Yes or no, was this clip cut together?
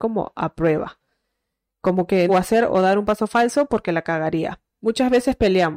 yes